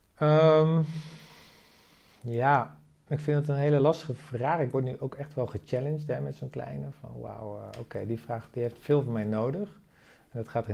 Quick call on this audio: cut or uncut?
uncut